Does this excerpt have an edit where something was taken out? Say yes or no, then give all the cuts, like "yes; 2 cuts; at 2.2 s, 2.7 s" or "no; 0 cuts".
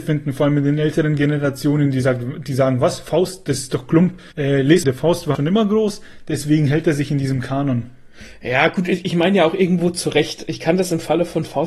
yes; 3 cuts; at 4.3 s, 4.8 s, 5.3 s